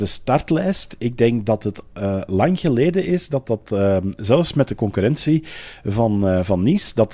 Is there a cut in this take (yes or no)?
no